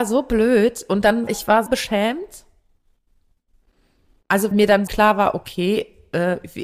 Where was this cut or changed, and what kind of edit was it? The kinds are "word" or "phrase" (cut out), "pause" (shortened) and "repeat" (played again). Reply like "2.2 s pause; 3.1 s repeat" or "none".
1.3 s word; 1.7 s word; 4.5 s word; 4.9 s word